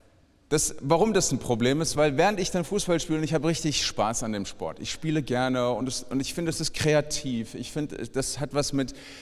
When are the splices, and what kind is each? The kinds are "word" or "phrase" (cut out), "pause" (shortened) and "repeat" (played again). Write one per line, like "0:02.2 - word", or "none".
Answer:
none